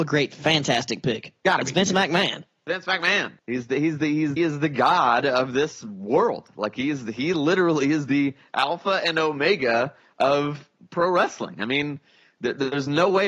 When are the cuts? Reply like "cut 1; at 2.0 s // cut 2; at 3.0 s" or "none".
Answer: cut 1; at 3.4 s // cut 2; at 4.4 s